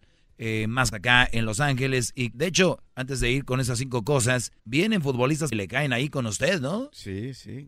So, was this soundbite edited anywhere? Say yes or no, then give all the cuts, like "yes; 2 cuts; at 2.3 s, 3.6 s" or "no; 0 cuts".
yes; 5 cuts; at 0.9 s, 2.3 s, 2.9 s, 4.6 s, 5.5 s